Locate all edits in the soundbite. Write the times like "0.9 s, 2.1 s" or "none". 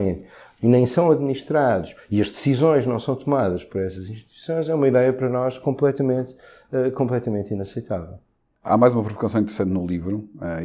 none